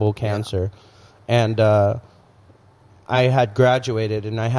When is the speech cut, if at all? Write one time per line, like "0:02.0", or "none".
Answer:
none